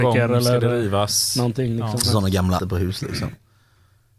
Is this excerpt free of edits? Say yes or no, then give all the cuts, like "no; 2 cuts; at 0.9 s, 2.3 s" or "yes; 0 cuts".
no; 2 cuts; at 2.0 s, 2.6 s